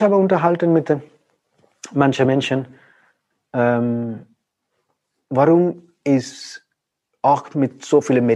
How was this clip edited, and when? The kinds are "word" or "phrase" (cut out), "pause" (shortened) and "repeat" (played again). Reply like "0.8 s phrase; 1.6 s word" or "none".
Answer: none